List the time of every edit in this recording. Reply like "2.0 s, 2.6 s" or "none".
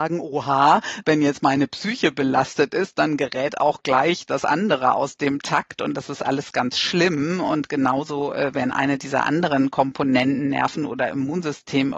none